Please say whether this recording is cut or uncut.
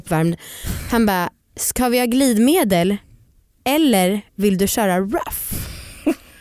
uncut